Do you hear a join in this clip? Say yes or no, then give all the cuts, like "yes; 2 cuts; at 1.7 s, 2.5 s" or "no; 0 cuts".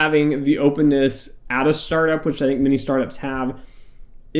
no; 0 cuts